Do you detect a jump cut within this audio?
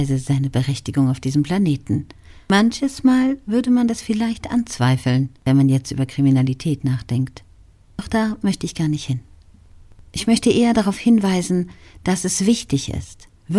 yes; 1 cut; at 5.4 s

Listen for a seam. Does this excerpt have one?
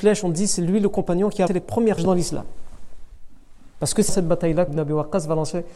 yes; 4 cuts; at 1.5 s, 2.0 s, 4.1 s, 4.7 s

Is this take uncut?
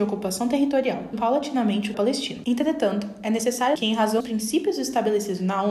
no; 4 cuts; at 1.1 s, 1.9 s, 3.8 s, 4.2 s

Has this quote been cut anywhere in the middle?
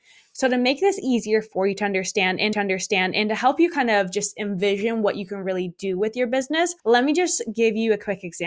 yes; 2 cuts; at 2.5 s, 6.8 s

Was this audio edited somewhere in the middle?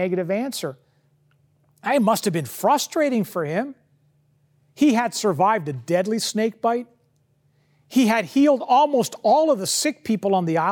no; 0 cuts

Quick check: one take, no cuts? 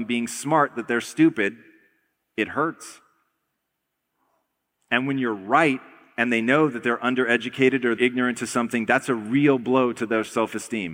no; 1 cut; at 8.0 s

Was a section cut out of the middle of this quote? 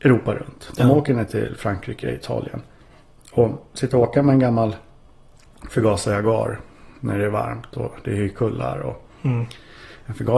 no; 0 cuts

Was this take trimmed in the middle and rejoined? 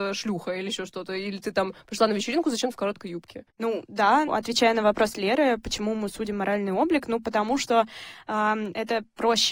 yes; 3 cuts; at 2.7 s, 3.5 s, 4.3 s

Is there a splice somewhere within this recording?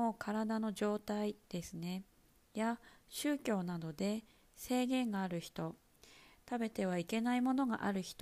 no; 0 cuts

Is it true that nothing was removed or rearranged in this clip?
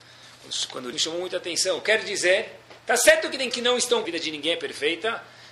no; 4 cuts; at 0.9 s, 2.8 s, 3.5 s, 4.0 s

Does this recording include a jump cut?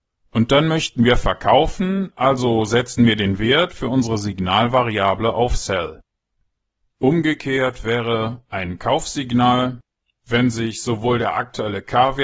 no; 0 cuts

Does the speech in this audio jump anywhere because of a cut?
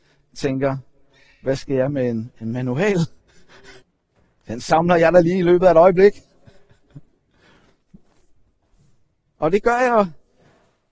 yes; 1 cut; at 3.8 s

